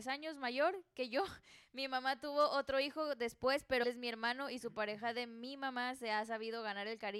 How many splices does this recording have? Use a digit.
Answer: 1